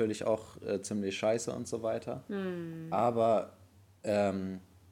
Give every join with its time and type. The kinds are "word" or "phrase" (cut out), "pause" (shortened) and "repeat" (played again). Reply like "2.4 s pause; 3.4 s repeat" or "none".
none